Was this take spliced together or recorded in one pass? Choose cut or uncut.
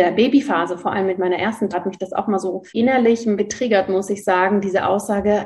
cut